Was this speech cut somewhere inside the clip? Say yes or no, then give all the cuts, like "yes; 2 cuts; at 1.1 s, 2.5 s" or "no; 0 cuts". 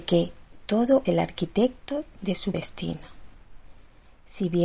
yes; 2 cuts; at 1.0 s, 2.5 s